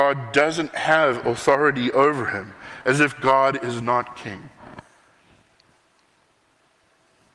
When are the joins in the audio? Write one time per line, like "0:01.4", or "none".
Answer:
none